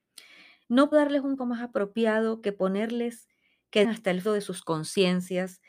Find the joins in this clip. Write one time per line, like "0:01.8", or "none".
0:00.9
0:01.4
0:03.8
0:04.2